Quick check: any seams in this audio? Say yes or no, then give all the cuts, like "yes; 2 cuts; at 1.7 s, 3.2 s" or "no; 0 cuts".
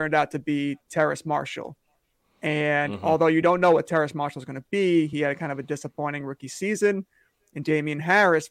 no; 0 cuts